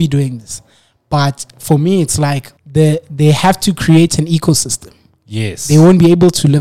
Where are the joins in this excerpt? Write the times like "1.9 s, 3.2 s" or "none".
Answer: 2.6 s